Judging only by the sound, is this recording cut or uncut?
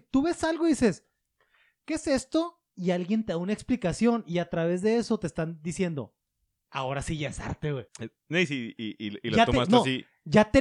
cut